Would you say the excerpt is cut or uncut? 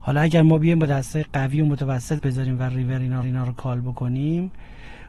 cut